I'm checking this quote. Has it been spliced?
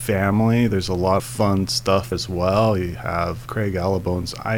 yes; 3 cuts; at 1.2 s, 2.1 s, 3.5 s

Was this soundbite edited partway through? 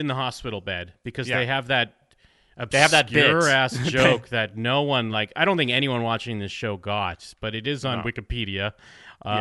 no; 0 cuts

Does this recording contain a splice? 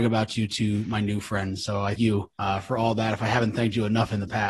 yes; 2 cuts; at 2.0 s, 2.3 s

